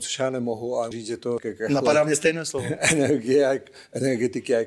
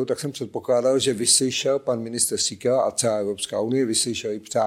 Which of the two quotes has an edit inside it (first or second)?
first